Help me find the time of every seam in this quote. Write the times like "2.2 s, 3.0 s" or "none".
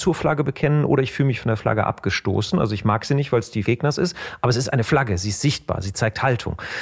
3.6 s